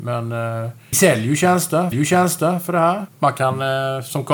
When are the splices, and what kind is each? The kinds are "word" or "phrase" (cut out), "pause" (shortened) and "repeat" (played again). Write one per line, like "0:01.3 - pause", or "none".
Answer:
0:00.9 - word
0:01.9 - repeat
0:03.1 - pause